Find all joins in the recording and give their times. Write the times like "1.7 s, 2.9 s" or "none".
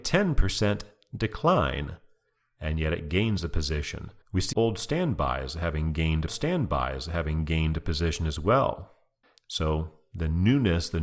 4.2 s, 4.5 s, 6.3 s, 9.2 s

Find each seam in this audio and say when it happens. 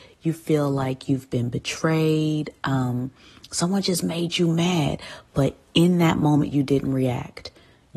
none

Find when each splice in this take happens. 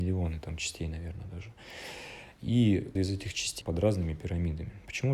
3.0 s, 3.6 s

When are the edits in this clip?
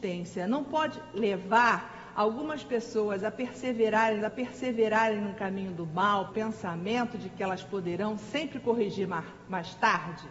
4.2 s, 6.3 s

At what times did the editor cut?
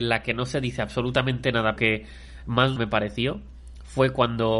1.8 s, 2.8 s

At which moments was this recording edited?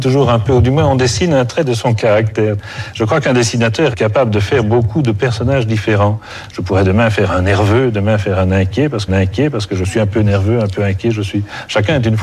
3.9 s, 9.1 s

